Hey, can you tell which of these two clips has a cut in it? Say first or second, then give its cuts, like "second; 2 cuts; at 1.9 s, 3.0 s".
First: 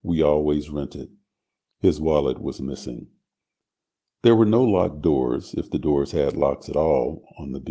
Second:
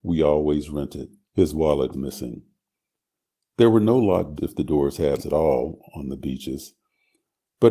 second; 4 cuts; at 1.2 s, 1.9 s, 4.4 s, 5.2 s